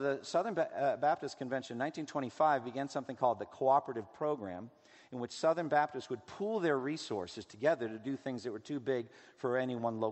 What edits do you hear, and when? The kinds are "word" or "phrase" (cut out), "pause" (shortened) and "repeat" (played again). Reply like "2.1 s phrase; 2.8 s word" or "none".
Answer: none